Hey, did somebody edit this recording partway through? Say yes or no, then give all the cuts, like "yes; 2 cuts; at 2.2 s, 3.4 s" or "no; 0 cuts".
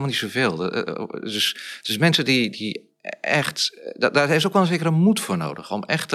yes; 1 cut; at 2.5 s